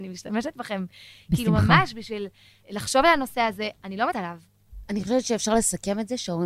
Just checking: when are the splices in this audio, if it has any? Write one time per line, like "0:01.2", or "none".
0:04.1